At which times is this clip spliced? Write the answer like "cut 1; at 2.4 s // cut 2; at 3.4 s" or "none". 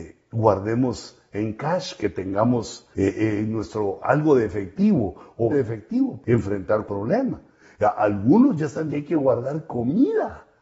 cut 1; at 2.9 s // cut 2; at 5.5 s // cut 3; at 6.2 s // cut 4; at 6.9 s // cut 5; at 8.9 s